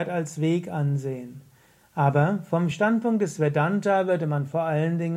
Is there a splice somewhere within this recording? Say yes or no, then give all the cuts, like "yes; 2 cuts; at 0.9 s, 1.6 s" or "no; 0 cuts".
no; 0 cuts